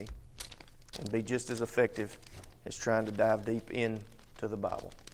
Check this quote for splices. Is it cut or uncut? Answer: uncut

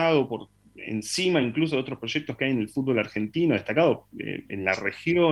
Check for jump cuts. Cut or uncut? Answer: uncut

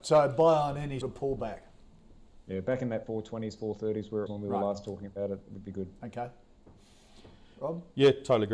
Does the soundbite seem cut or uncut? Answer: cut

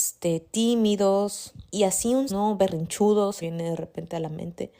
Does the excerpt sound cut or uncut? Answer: cut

